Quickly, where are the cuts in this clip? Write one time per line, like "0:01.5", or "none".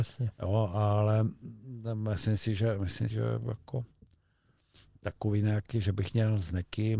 0:03.1